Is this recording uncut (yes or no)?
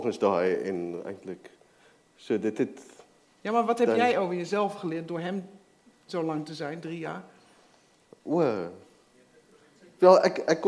yes